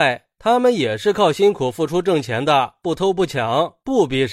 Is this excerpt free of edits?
yes; 0 cuts

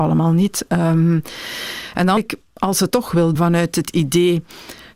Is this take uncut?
no; 3 cuts; at 2.2 s, 2.9 s, 3.4 s

